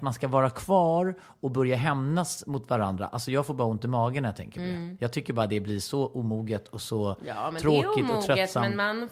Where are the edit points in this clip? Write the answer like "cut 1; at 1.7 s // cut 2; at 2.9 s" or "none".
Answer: none